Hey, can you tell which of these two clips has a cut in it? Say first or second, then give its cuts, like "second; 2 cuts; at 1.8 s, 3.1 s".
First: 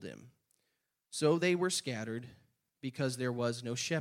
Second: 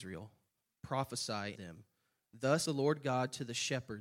second; 2 cuts; at 1.6 s, 2.7 s